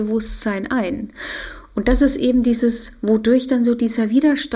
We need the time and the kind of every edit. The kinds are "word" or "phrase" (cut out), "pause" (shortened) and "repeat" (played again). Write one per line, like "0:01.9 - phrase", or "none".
none